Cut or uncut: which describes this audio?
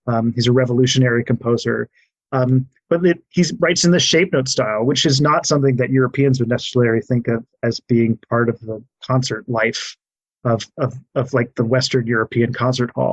uncut